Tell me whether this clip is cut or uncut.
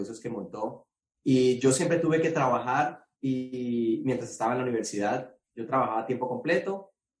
cut